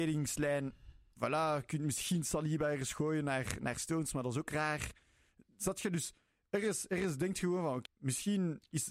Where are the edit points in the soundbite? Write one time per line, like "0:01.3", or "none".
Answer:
0:07.9